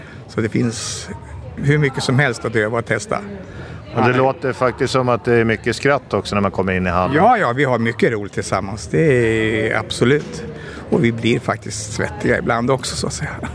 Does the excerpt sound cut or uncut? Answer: cut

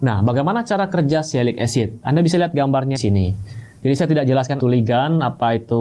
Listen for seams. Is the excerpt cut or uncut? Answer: cut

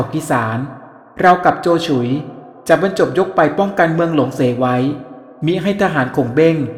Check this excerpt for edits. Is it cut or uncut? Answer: uncut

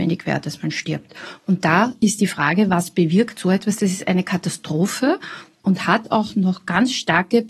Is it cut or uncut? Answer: uncut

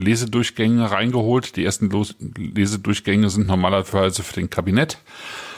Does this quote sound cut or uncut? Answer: uncut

